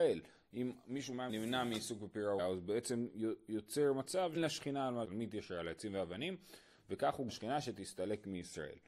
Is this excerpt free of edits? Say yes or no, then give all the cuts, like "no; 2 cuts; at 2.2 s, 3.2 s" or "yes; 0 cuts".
no; 5 cuts; at 1.3 s, 2.4 s, 4.4 s, 5.0 s, 7.3 s